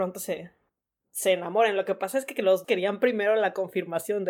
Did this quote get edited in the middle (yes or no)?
yes